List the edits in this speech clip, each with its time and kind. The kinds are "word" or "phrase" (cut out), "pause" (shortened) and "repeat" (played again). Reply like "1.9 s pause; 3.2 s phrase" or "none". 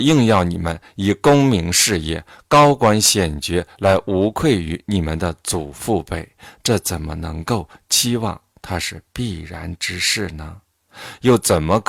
none